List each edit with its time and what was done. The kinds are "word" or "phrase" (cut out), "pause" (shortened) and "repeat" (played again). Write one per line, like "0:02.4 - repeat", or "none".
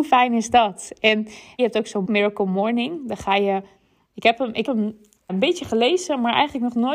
0:01.6 - word
0:02.0 - word
0:04.7 - word
0:05.3 - word

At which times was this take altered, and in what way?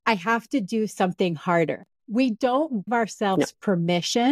0:02.0 - pause
0:02.9 - word

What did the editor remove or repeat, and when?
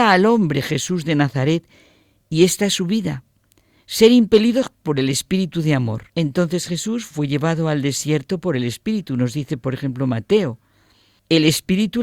0:06.1 - pause

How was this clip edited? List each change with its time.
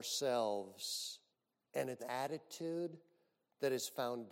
0:01.3 - pause
0:02.0 - word

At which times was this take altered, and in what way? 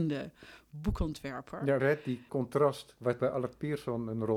0:01.8 - word
0:02.3 - word
0:03.2 - word

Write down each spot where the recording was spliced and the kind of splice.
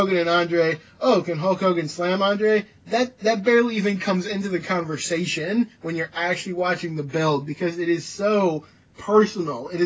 none

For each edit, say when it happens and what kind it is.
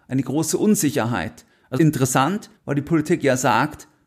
0:01.8 - word
0:02.6 - pause

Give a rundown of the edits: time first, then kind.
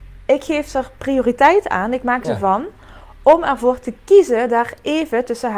0:02.2 - phrase

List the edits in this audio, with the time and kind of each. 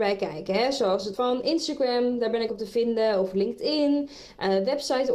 0:01.1 - word
0:02.5 - word

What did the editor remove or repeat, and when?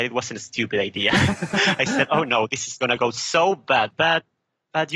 none

